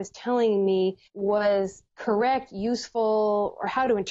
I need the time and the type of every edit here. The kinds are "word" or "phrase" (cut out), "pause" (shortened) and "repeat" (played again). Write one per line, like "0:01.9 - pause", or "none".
0:01.1 - pause